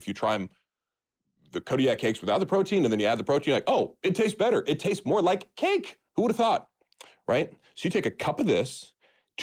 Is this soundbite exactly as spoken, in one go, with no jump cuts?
no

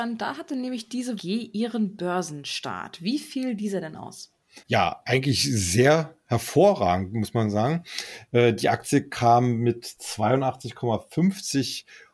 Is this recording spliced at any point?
yes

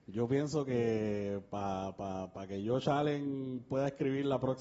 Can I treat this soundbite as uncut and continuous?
yes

